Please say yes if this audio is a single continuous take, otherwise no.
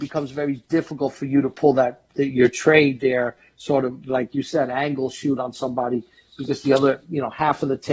yes